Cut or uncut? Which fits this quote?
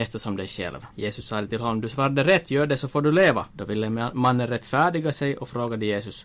cut